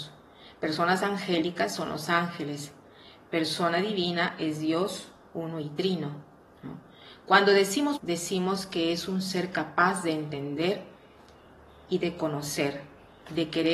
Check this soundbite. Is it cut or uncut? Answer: cut